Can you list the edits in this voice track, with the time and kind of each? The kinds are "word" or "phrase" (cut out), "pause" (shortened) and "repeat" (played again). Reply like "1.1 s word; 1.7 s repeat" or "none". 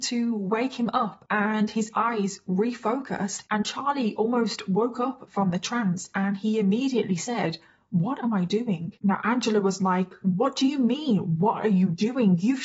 none